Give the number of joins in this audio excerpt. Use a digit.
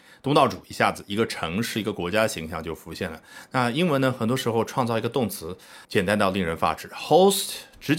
1